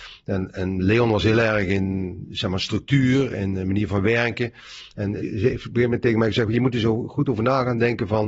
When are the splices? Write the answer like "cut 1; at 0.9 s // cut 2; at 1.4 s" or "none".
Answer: cut 1; at 5.2 s